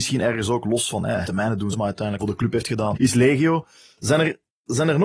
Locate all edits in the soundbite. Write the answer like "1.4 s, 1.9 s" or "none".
1.2 s, 1.7 s, 2.2 s, 2.9 s

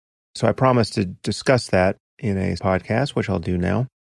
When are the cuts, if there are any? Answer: 2.1 s, 2.6 s

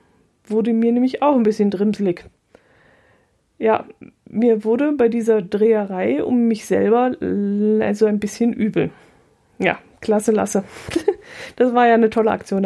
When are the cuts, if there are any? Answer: none

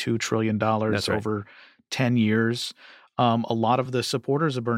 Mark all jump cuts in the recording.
none

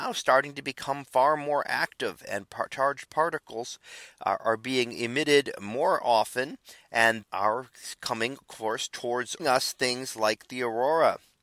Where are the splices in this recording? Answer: 7.2 s, 9.4 s

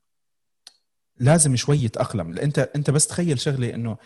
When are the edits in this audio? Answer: none

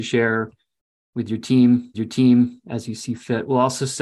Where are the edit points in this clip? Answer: 1.9 s

